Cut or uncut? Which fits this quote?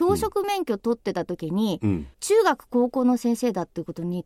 cut